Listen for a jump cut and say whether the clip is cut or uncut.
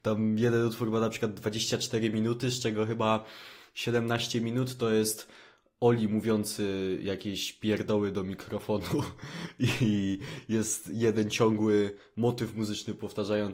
uncut